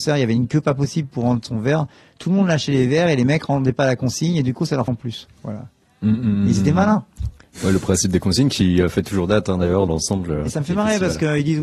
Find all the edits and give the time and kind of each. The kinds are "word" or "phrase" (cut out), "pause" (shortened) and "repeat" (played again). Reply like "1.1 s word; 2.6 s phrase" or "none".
4.9 s phrase; 9.9 s word